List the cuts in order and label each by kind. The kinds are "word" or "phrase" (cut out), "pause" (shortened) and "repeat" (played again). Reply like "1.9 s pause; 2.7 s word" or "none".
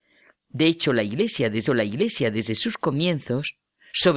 1.7 s repeat